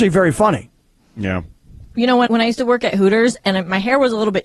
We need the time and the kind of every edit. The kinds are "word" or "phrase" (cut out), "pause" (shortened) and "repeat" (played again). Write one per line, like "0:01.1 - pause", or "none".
0:02.3 - word